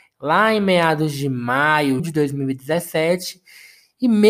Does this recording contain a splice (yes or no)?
yes